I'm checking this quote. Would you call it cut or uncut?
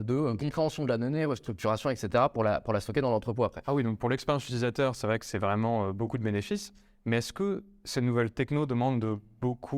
uncut